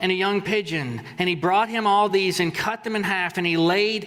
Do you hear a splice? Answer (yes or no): no